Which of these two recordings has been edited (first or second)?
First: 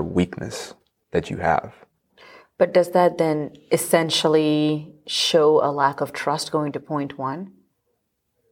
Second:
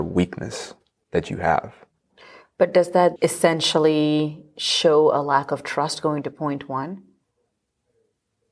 second